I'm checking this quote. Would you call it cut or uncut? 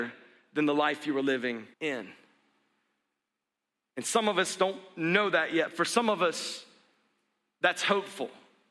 cut